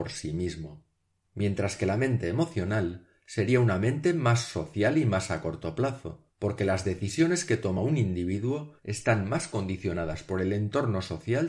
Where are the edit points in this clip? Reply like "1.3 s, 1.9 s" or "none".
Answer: none